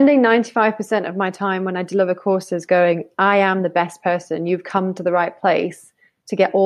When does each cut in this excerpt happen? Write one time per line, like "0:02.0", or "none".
none